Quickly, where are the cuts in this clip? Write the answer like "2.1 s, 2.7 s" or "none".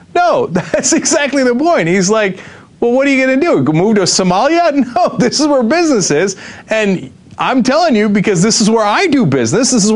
none